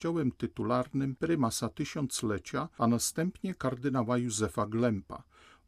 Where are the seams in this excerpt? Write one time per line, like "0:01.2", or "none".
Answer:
none